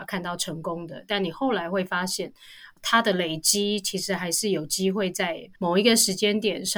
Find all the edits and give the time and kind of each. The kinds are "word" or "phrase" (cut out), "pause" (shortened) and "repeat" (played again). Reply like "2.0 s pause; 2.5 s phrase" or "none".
5.6 s pause